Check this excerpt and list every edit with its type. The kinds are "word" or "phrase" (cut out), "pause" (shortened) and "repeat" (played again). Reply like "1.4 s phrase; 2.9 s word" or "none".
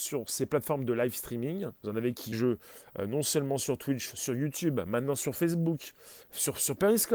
1.8 s pause; 2.3 s phrase; 6.2 s pause